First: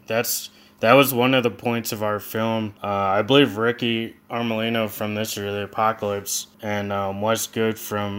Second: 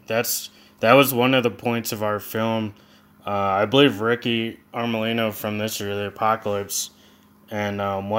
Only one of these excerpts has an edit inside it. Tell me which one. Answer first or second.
first